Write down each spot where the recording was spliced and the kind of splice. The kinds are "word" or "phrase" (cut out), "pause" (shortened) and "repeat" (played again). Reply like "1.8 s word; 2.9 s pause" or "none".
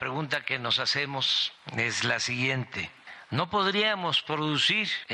none